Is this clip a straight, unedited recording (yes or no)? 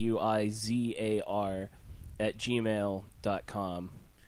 yes